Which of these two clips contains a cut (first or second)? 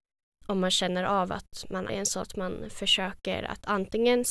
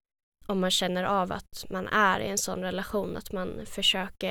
first